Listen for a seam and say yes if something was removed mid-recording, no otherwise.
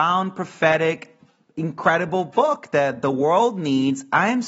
no